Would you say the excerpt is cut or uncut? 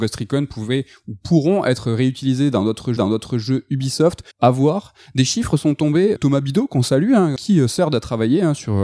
cut